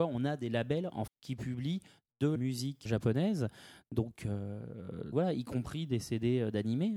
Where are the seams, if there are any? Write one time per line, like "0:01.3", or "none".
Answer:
0:01.1
0:02.4
0:02.9
0:05.1

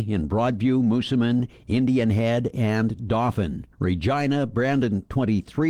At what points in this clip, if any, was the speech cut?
0:03.7

